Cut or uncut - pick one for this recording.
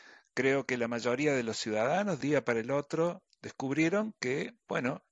cut